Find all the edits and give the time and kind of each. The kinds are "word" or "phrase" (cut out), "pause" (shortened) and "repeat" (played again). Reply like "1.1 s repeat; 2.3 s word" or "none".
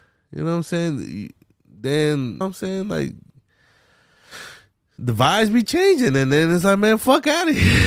2.4 s phrase